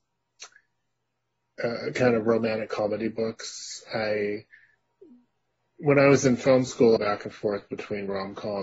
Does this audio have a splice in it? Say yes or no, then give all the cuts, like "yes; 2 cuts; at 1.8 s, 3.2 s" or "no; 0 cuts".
yes; 1 cut; at 7.0 s